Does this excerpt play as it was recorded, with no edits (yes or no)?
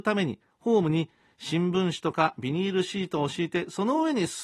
yes